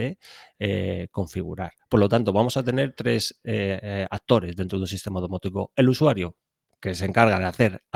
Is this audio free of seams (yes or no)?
yes